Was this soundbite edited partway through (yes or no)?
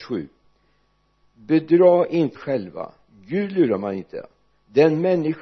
yes